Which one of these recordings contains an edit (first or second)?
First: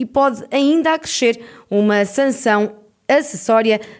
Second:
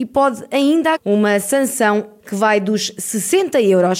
second